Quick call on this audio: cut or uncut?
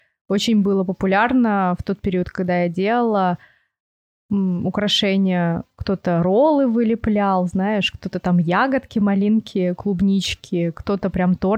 uncut